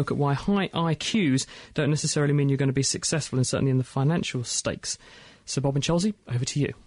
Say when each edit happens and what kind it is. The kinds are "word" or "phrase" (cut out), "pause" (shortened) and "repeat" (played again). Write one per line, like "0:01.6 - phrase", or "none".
none